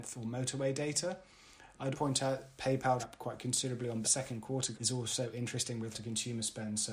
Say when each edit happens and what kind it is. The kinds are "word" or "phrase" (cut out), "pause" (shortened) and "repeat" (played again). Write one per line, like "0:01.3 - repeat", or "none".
0:01.9 - word
0:02.6 - word
0:03.0 - word
0:04.0 - word
0:04.7 - word
0:05.9 - word